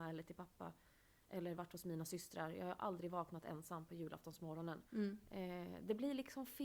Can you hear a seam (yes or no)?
yes